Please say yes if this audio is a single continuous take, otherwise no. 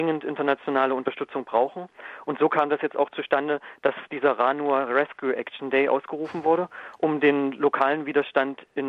yes